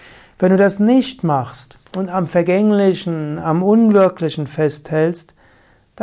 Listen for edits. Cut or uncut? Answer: uncut